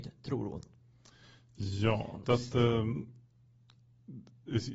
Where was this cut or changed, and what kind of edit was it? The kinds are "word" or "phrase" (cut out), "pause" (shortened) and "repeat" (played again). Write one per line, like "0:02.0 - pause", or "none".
0:02.2 - word